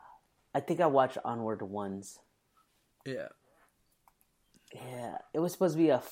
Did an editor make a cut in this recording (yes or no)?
no